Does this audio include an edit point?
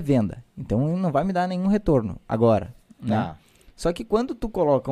no; 0 cuts

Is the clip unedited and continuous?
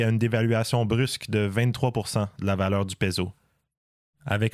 yes; 0 cuts

